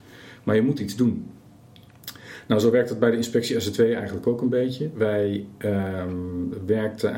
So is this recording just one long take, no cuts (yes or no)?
yes